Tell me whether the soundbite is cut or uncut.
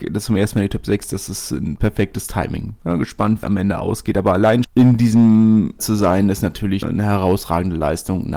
cut